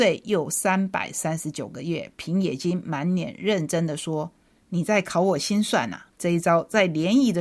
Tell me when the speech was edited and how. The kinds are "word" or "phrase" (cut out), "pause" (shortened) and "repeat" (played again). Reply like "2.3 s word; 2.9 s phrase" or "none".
6.1 s pause